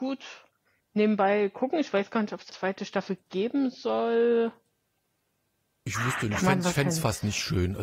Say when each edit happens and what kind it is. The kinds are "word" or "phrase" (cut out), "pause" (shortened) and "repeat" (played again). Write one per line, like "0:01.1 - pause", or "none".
0:02.5 - word